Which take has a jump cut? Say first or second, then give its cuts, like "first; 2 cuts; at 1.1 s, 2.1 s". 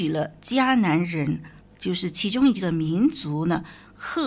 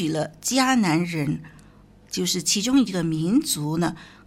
first; 1 cut; at 1.6 s